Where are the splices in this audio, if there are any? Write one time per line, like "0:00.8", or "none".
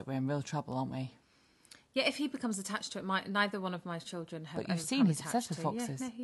none